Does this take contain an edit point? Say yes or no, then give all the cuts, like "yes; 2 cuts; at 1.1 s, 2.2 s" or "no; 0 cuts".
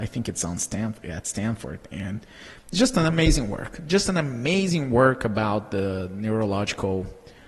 no; 0 cuts